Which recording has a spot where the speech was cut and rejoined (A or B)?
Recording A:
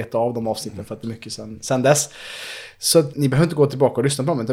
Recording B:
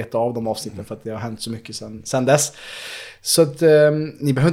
A